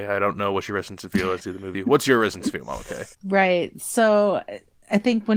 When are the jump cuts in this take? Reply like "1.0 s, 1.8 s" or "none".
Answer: 1.4 s, 1.7 s, 3.1 s